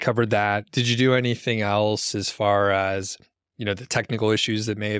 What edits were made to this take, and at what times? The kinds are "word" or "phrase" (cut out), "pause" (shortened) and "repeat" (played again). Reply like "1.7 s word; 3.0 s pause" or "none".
none

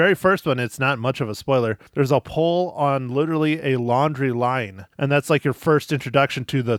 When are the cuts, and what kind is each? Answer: 1.9 s pause; 4.9 s pause

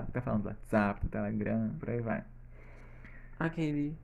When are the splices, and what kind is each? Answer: 1.8 s word

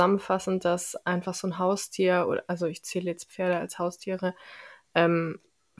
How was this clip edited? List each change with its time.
none

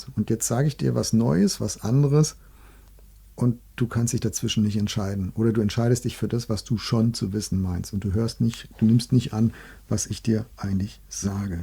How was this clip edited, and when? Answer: none

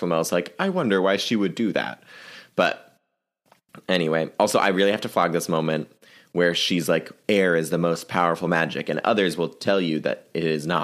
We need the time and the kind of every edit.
none

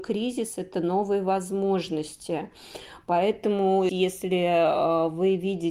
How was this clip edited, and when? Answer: 3.9 s word

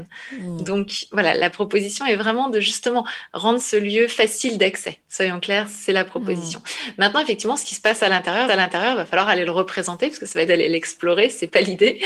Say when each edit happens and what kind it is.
5.0 s pause; 8.5 s repeat; 10.5 s phrase

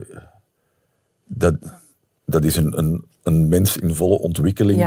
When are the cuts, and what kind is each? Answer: none

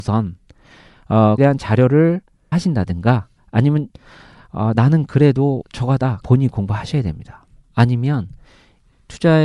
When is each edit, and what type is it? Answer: 1.4 s word; 2.5 s word; 4.7 s word; 5.6 s word; 6.2 s word

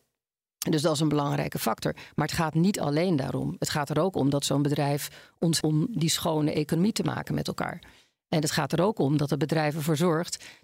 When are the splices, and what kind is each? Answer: 5.6 s word

